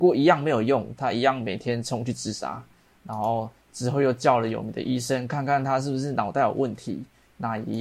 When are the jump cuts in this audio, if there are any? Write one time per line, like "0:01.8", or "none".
none